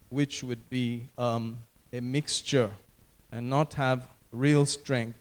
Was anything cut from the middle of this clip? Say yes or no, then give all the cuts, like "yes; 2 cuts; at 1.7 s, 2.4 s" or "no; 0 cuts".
no; 0 cuts